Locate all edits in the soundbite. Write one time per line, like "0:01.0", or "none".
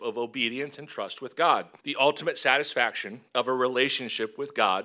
0:01.8
0:03.3